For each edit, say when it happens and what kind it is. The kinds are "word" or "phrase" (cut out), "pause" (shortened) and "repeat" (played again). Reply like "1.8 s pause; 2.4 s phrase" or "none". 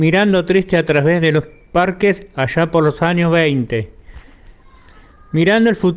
none